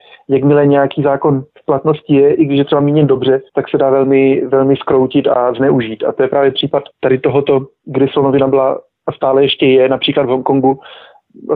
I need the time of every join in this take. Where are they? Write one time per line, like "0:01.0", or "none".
0:01.5
0:03.5
0:06.9